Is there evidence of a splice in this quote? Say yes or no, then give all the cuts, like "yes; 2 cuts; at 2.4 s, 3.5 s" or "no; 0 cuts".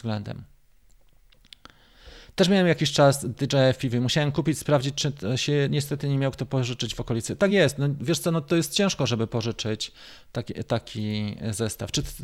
no; 0 cuts